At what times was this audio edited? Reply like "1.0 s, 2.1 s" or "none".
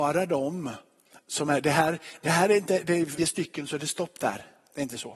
3.2 s